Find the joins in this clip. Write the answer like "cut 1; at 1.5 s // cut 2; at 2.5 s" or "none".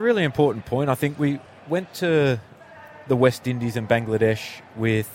none

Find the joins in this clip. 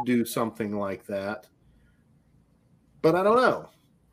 none

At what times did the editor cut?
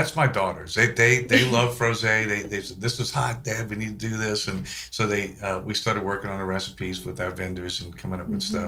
none

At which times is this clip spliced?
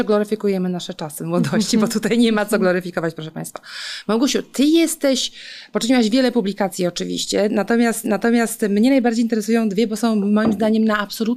cut 1; at 8.0 s

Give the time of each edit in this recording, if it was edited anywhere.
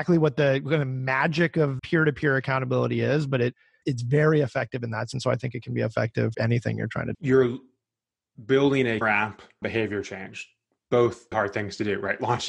cut 1; at 1.8 s // cut 2; at 3.8 s // cut 3; at 5.1 s // cut 4; at 6.3 s // cut 5; at 7.1 s // cut 6; at 9.0 s // cut 7; at 9.6 s // cut 8; at 11.3 s

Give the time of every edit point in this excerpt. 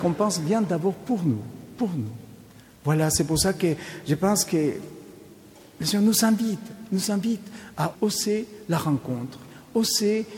cut 1; at 7.9 s

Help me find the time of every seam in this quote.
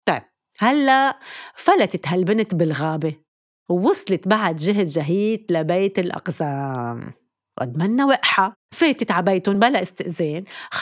none

